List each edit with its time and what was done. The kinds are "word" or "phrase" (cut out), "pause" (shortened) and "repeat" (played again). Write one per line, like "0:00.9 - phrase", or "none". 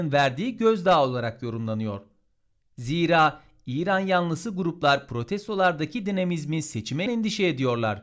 0:07.1 - word

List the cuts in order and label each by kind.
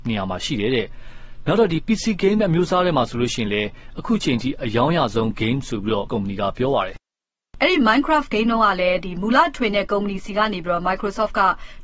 0:06.1 - word

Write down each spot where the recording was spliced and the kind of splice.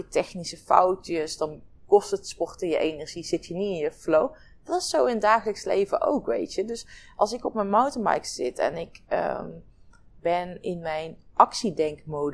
none

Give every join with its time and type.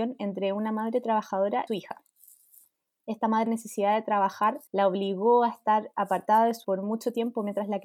0:01.7 - phrase
0:03.5 - phrase
0:04.7 - pause
0:06.6 - word

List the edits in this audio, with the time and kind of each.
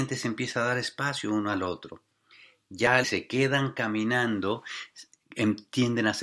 0:03.0 - phrase

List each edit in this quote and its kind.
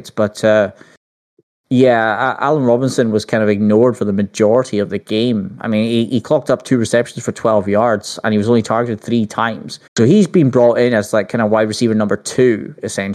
0:09.9 - pause

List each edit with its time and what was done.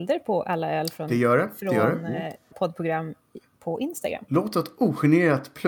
0:02.5 - word

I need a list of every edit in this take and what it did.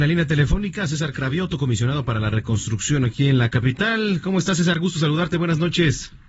none

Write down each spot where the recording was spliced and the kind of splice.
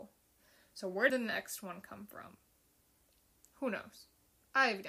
0:01.1 - word

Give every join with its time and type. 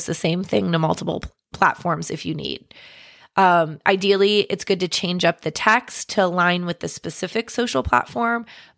none

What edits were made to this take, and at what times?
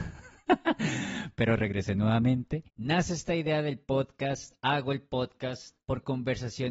0:02.7 - pause
0:05.8 - pause

